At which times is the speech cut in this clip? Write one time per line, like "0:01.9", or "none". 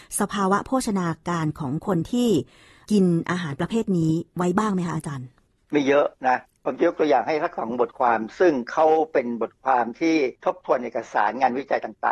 0:10.4